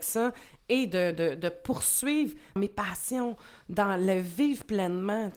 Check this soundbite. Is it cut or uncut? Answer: cut